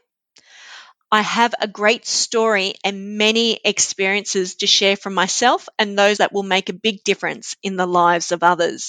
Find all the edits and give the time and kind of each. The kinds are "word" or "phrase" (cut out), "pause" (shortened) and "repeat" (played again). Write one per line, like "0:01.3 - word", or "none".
0:06.2 - phrase

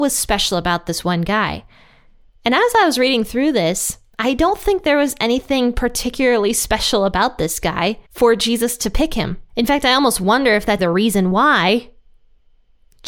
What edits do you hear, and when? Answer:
0:08.0 - pause
0:10.8 - word

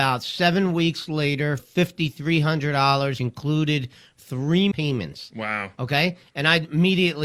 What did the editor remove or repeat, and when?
0:01.6 - word
0:03.2 - word
0:04.7 - phrase

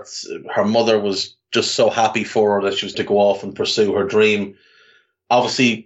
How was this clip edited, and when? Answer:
0:02.9 - word

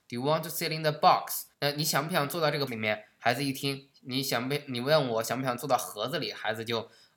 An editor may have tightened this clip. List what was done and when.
0:01.5 - pause
0:02.7 - word
0:03.9 - word

